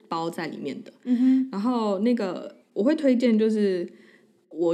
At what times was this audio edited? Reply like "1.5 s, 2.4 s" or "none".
2.6 s